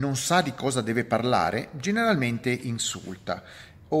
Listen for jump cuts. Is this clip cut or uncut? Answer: uncut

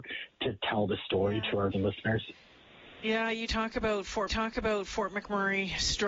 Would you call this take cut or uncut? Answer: cut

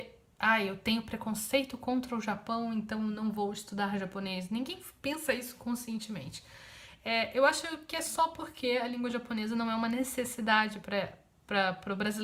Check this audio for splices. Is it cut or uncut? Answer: uncut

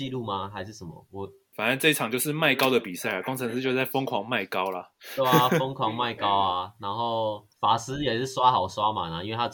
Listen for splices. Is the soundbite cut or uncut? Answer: cut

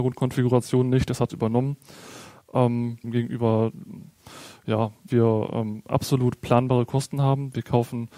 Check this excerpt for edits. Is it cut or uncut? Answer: cut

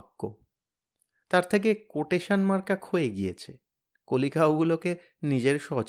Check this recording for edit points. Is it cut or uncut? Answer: uncut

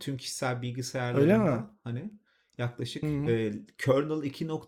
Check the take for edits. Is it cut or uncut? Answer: uncut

